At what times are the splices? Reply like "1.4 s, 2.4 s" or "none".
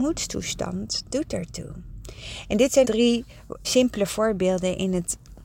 2.8 s, 3.6 s